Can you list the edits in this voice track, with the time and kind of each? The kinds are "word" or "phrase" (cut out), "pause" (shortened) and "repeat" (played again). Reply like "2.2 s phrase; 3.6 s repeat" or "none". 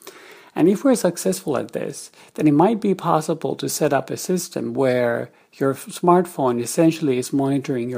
none